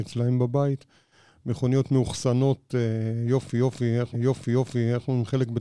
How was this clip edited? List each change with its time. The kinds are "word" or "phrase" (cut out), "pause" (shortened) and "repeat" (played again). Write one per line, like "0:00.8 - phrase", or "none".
0:04.1 - repeat